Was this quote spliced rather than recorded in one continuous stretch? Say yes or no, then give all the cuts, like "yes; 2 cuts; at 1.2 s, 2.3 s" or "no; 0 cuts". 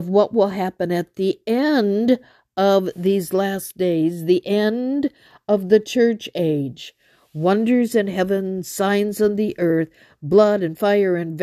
no; 0 cuts